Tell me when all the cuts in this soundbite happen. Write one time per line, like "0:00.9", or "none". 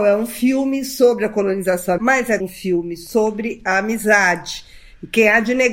0:02.0
0:02.4